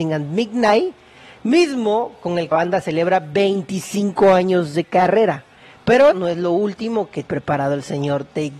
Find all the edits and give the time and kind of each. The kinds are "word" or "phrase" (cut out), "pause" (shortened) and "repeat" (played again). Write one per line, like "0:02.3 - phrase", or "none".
0:02.5 - word
0:06.1 - word
0:07.2 - word